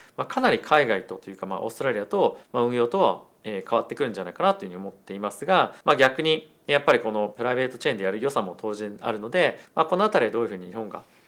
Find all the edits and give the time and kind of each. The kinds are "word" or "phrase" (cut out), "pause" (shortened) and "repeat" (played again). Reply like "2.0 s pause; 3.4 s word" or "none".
2.4 s pause; 5.8 s pause; 9.7 s pause